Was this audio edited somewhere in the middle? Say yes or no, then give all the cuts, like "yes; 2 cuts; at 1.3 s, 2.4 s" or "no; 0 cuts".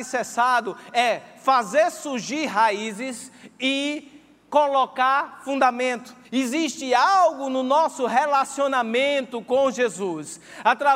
yes; 1 cut; at 6.2 s